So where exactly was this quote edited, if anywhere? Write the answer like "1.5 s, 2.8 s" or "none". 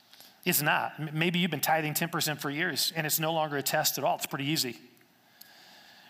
none